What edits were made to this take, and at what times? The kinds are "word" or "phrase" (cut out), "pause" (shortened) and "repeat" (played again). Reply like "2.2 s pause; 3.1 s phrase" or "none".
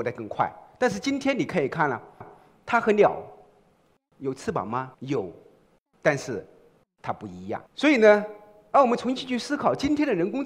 2.2 s repeat; 4.9 s pause; 7.7 s pause

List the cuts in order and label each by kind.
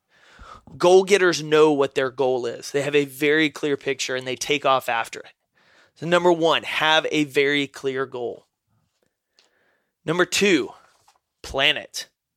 none

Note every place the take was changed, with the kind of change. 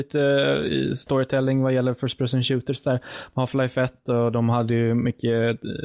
none

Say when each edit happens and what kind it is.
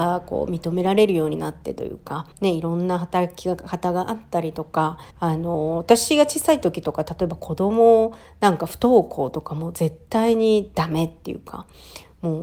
2.3 s pause; 5.1 s pause

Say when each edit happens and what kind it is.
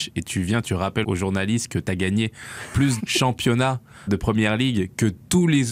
1.0 s word; 3.0 s word; 4.1 s word

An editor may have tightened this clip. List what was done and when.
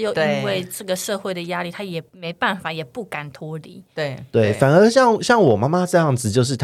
2.1 s pause

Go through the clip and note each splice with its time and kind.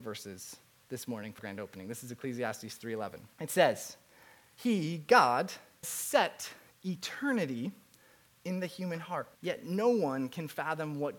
1.4 s word; 3.3 s pause; 5.8 s word; 9.3 s pause

